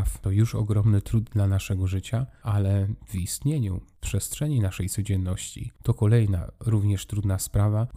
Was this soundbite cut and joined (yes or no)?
yes